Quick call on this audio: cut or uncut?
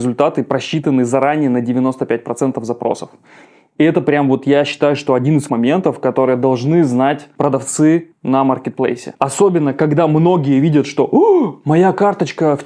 cut